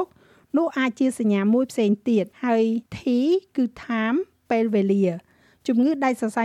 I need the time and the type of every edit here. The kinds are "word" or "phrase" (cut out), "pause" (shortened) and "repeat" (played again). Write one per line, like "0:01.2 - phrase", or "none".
0:02.3 - pause
0:02.9 - pause